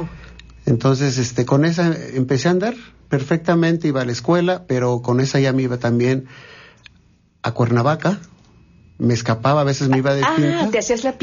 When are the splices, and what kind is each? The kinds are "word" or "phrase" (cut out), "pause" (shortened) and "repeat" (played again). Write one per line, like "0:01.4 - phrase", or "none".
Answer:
none